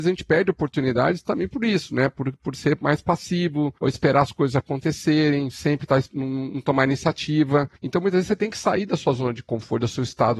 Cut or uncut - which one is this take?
cut